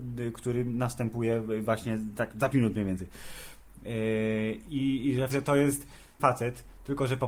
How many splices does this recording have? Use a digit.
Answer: 3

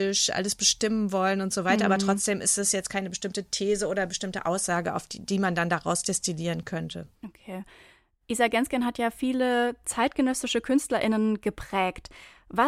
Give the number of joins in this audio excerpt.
1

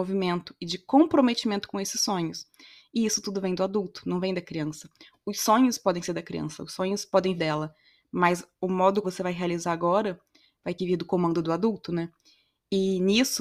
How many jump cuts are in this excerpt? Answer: 3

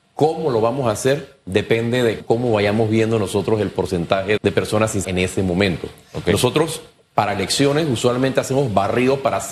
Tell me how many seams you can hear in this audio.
3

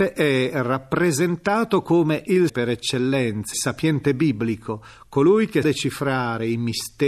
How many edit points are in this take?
3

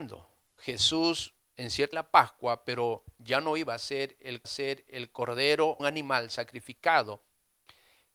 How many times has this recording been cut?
3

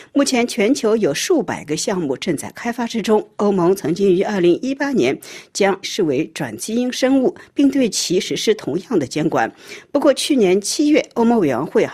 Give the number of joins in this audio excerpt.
1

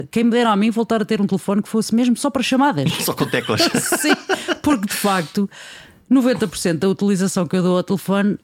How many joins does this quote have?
0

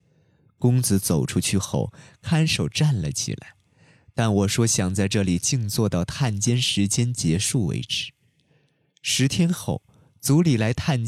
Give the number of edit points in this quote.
0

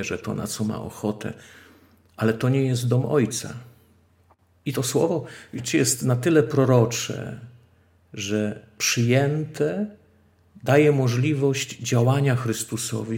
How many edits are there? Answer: 0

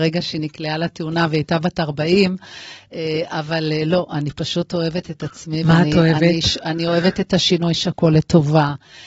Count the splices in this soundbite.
1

